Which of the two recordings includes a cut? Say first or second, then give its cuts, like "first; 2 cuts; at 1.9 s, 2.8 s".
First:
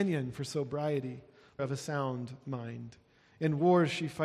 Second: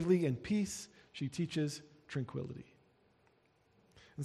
first; 1 cut; at 1.6 s